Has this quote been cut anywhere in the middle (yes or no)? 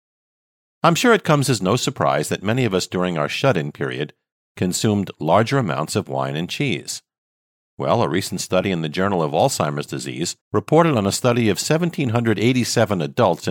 yes